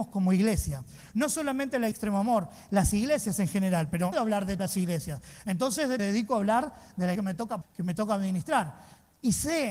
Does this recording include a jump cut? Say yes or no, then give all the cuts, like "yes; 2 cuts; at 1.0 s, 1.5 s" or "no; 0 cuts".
yes; 6 cuts; at 1.9 s, 4.1 s, 4.6 s, 6.0 s, 7.2 s, 7.6 s